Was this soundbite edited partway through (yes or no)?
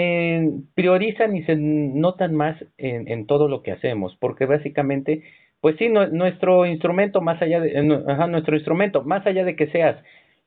no